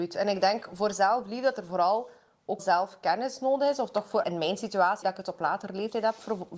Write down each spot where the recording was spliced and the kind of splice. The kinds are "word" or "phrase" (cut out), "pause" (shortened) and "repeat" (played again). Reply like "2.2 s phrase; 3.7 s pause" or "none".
2.6 s word; 4.2 s word; 5.0 s word